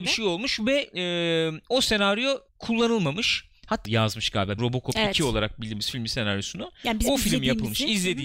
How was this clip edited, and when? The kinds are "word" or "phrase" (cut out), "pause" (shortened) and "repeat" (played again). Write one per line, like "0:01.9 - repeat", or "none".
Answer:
0:02.5 - pause
0:03.8 - phrase
0:04.6 - word